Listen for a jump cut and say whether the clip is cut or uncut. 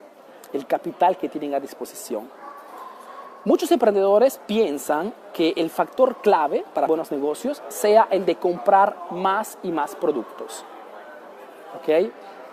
cut